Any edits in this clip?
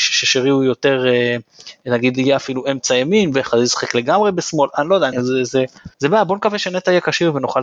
yes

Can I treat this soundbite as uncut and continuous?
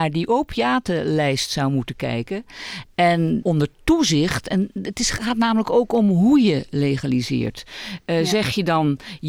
no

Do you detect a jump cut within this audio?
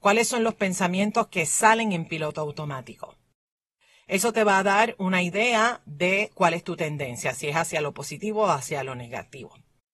no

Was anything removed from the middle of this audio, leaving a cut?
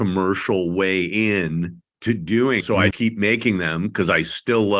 yes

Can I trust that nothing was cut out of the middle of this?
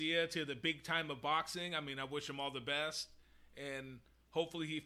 yes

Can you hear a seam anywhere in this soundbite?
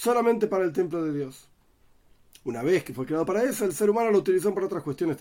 no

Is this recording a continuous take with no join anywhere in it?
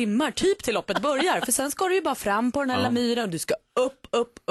yes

